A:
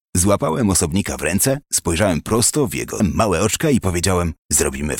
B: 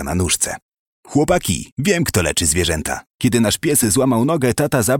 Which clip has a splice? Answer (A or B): A